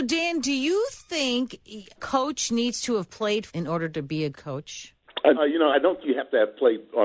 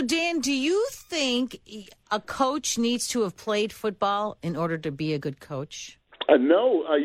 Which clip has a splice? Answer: first; 6 cuts; at 2.0 s, 3.5 s, 4.3 s, 5.3 s, 5.7 s, 6.0 s

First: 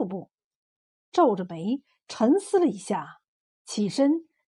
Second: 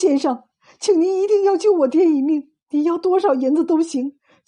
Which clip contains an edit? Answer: second; 1 cut; at 2.6 s

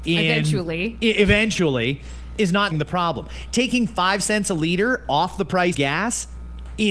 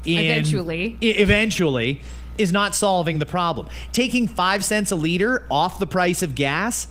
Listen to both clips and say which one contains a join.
first; 2 cuts; at 2.7 s, 5.7 s

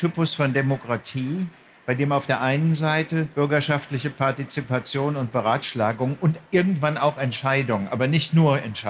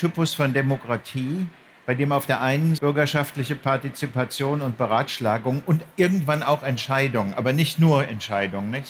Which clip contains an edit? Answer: second; 1 cut; at 2.8 s

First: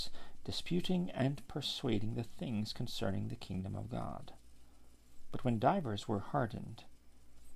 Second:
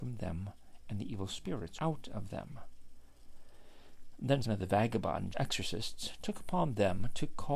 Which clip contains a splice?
second; 3 cuts; at 1.8 s, 4.4 s, 5.3 s

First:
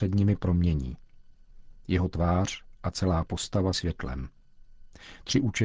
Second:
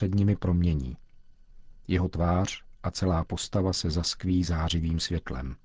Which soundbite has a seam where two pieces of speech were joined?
first; 1 cut; at 3.7 s

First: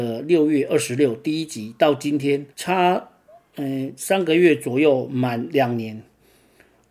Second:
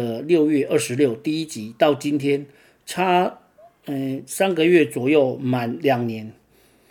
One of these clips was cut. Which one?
first; 1 cut; at 2.5 s

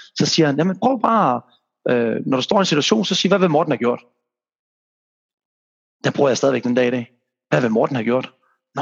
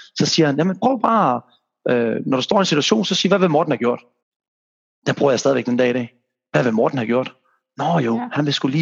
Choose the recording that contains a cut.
second; 1 cut; at 4.2 s

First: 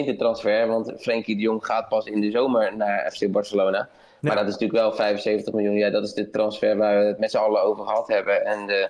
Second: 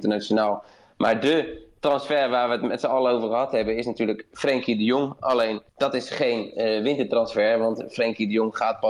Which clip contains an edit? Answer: second; 1 cut; at 5.7 s

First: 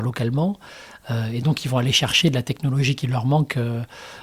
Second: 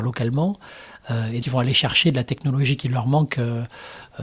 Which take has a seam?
second; 1 cut; at 1.4 s

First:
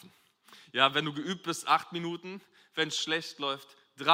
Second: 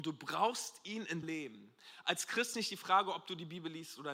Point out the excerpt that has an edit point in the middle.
second; 2 cuts; at 1.2 s, 2.5 s

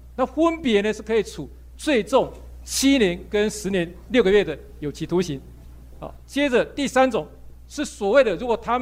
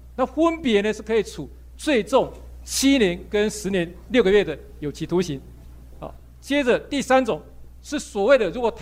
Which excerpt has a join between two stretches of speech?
first; 1 cut; at 6.2 s

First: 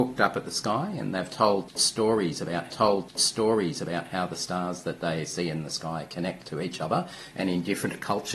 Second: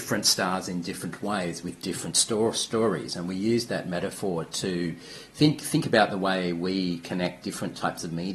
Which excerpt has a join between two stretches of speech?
first; 1 cut; at 2.7 s

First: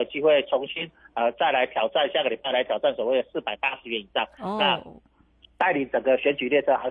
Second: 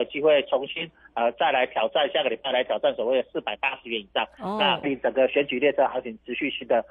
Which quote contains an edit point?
second; 1 cut; at 4.8 s

